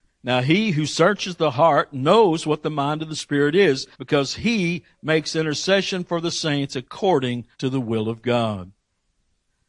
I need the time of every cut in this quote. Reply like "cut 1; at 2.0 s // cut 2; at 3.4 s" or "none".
cut 1; at 3.9 s // cut 2; at 7.5 s